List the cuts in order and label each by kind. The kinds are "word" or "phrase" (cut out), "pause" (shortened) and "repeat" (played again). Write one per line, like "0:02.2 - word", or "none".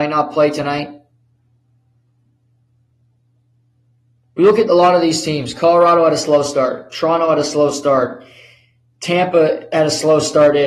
none